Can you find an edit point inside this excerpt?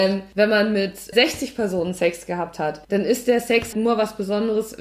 yes; 3 cuts; at 1.1 s, 2.8 s, 3.7 s

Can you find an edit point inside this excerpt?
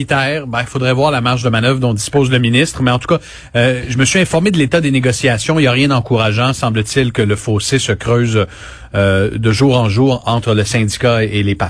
no; 0 cuts

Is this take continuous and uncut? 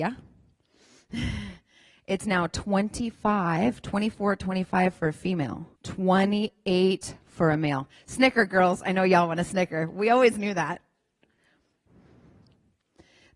no; 1 cut; at 5.8 s

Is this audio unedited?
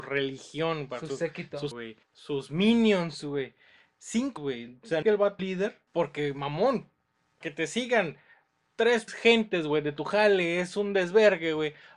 no; 8 cuts; at 1.7 s, 2.0 s, 4.4 s, 5.0 s, 5.4 s, 5.9 s, 7.4 s, 9.1 s

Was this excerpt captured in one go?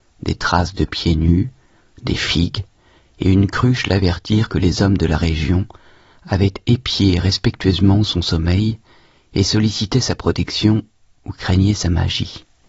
yes; 0 cuts

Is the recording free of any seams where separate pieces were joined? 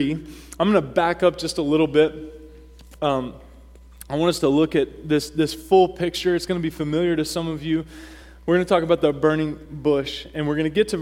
yes; 0 cuts

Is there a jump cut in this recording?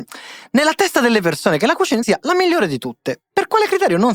yes; 1 cut; at 2.0 s

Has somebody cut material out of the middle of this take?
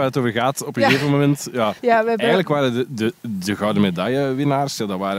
yes; 1 cut; at 1.8 s

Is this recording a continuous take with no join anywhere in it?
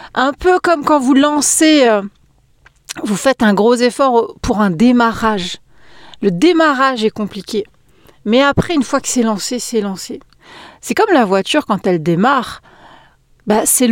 yes; 0 cuts

